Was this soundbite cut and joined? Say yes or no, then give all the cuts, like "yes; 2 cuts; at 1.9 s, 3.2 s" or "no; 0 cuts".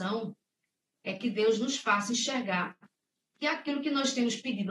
no; 0 cuts